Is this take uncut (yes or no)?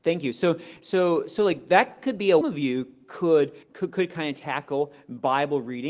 no